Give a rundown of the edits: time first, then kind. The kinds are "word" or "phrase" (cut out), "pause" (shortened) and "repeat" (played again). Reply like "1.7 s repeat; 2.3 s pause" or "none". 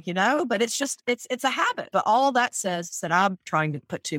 none